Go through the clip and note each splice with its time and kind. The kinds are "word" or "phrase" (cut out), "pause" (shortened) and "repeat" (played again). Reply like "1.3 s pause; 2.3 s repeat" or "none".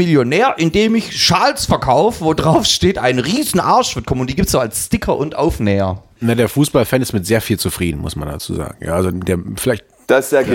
6.1 s pause; 9.1 s word